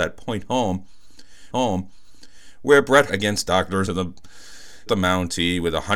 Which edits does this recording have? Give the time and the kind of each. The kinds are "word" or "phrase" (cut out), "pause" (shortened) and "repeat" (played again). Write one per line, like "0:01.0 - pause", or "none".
0:01.5 - repeat
0:03.1 - word
0:03.9 - phrase
0:04.9 - phrase